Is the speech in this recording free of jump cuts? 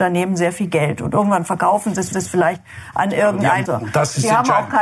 no; 2 cuts; at 2.1 s, 3.7 s

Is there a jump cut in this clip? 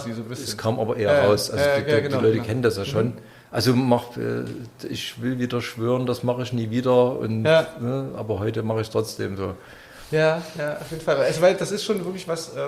no; 0 cuts

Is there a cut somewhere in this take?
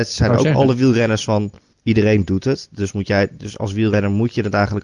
yes; 1 cut; at 1.7 s

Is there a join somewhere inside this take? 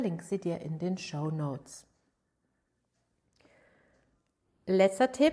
no; 0 cuts

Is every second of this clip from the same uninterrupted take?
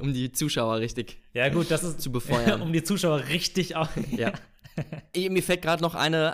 yes; 0 cuts

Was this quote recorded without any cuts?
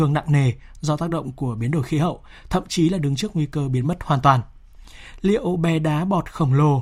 yes; 0 cuts

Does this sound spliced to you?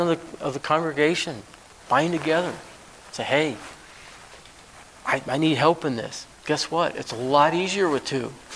no; 0 cuts

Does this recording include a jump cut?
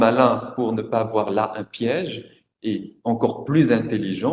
no; 0 cuts

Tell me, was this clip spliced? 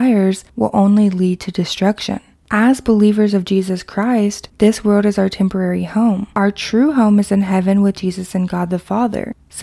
no; 0 cuts

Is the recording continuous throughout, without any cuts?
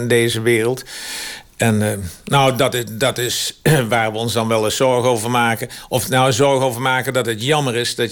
yes; 0 cuts

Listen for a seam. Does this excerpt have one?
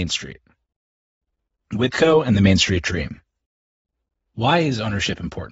no; 0 cuts

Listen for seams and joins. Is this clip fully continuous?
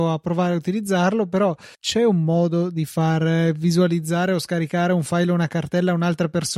no; 1 cut; at 1.7 s

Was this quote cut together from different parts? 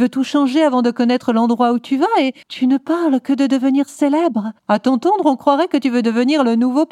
yes; 2 cuts; at 2.4 s, 4.6 s

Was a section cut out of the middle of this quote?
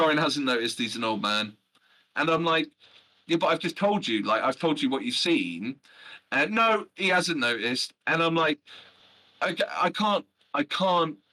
no; 0 cuts

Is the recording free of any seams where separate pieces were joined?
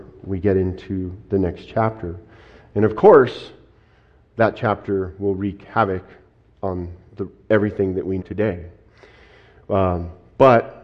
no; 1 cut; at 8.2 s

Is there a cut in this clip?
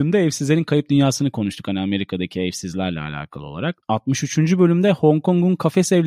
yes; 1 cut; at 3.8 s

